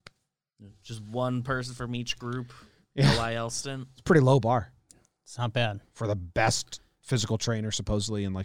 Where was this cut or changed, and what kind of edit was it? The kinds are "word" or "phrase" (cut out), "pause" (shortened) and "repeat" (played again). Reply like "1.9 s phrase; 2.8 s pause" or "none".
none